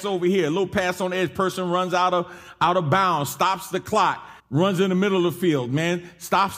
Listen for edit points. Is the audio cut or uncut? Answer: cut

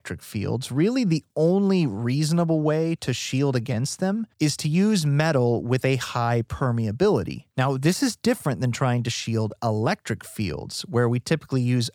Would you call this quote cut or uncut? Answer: cut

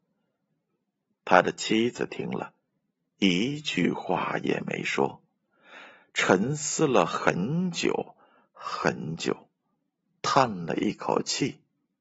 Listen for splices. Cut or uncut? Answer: uncut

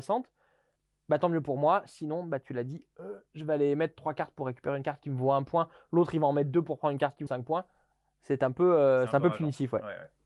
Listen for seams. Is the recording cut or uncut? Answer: cut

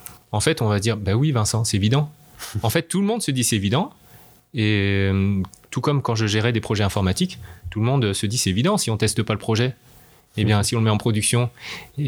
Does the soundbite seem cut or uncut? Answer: uncut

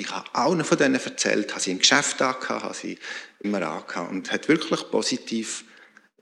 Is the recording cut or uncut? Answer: cut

